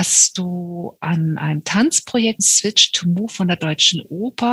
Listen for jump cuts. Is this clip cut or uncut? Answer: cut